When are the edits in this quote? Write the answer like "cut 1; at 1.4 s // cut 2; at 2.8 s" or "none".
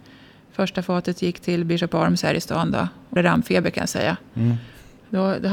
cut 1; at 3.2 s

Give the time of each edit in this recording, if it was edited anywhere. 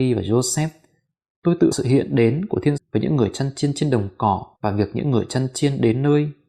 cut 1; at 1.7 s // cut 2; at 2.8 s // cut 3; at 4.5 s

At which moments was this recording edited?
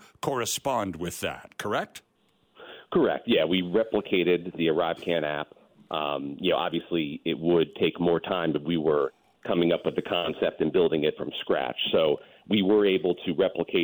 none

